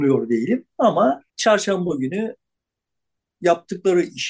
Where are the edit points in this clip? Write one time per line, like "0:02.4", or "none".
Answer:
0:01.3